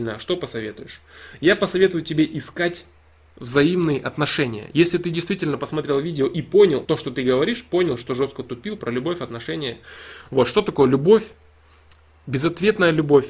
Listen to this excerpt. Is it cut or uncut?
cut